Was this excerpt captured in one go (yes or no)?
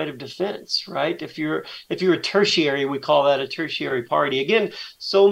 yes